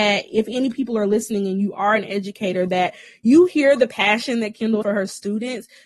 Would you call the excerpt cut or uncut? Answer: cut